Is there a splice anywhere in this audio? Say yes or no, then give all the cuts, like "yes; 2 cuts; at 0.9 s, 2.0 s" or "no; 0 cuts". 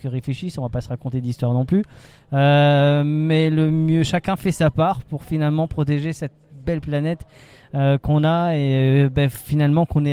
no; 0 cuts